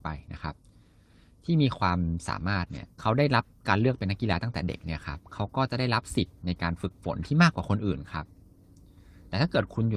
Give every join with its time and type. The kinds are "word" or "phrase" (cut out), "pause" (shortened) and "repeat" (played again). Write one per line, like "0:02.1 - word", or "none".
0:02.9 - pause